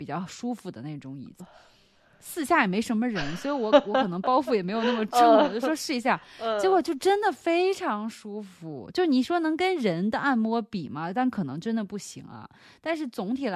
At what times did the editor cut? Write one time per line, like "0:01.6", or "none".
0:01.4